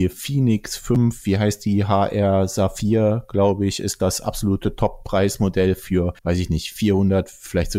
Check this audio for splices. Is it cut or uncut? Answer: cut